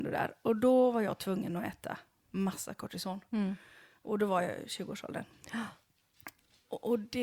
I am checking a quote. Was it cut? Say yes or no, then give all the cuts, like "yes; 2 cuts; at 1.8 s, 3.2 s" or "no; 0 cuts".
no; 0 cuts